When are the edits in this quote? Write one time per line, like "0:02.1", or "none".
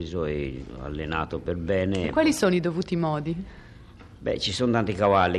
none

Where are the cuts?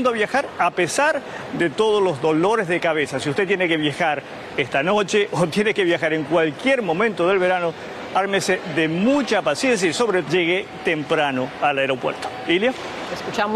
0:10.2

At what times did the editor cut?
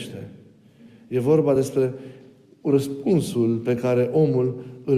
none

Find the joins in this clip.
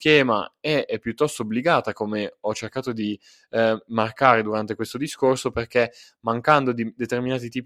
none

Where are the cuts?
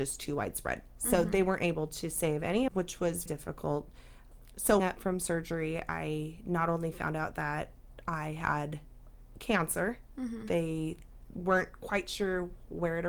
0:02.7
0:03.3
0:04.8

